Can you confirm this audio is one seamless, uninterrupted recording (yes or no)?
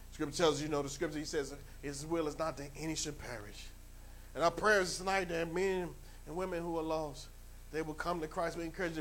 yes